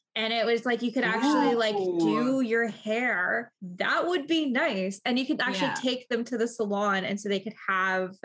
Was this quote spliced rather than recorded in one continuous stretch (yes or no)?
yes